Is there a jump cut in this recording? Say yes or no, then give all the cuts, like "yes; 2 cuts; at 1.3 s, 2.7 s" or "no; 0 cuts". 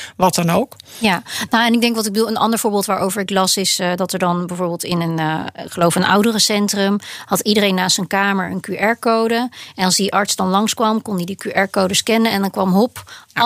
no; 0 cuts